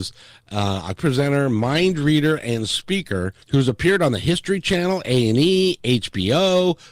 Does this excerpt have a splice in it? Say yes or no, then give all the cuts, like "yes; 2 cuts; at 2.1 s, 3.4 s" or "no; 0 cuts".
yes; 2 cuts; at 1.0 s, 3.4 s